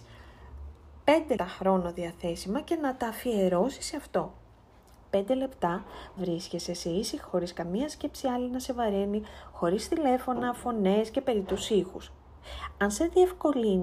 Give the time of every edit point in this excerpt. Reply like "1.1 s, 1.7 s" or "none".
1.4 s, 6.2 s, 7.3 s